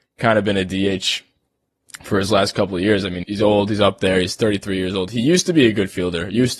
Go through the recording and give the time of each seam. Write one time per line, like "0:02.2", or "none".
0:03.2

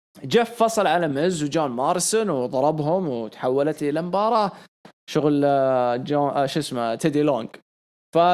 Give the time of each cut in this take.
none

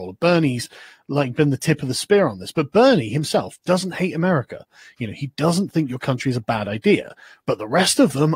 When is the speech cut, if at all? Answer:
none

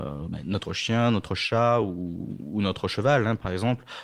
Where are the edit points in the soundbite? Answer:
none

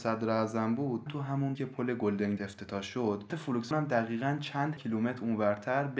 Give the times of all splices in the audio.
0:01.1
0:01.5
0:02.4
0:03.3
0:03.7
0:04.8

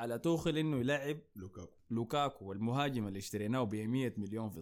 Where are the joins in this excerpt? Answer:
none

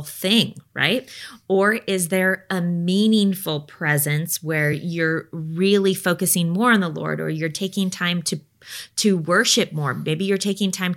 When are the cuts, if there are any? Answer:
none

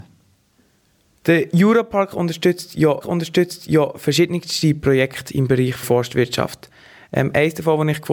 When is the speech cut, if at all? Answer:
0:03.0
0:05.8

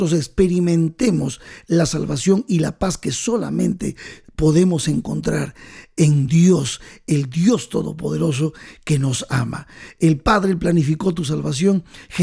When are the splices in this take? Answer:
none

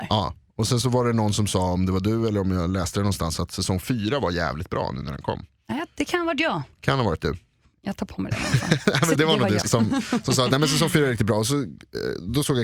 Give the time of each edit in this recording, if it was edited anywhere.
0:09.2
0:09.6

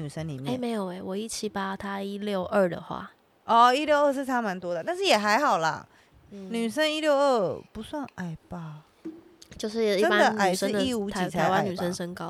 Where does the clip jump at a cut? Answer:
0:07.7

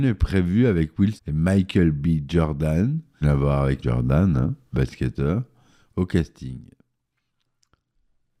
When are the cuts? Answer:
0:01.2
0:03.2
0:03.8
0:04.7

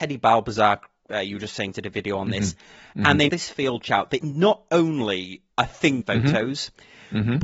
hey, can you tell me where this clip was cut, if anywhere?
0:01.7
0:03.3
0:03.8
0:04.2
0:05.5
0:06.0

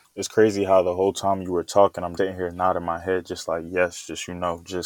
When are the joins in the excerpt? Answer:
0:02.2

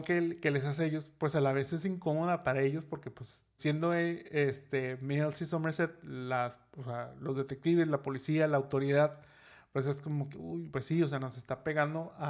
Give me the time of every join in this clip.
0:03.6
0:10.3
0:10.7

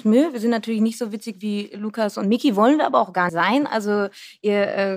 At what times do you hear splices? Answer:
0:03.3

